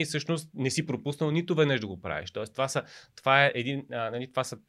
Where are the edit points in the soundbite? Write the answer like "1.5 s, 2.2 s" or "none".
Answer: none